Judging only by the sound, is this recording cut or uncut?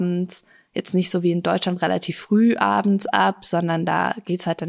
uncut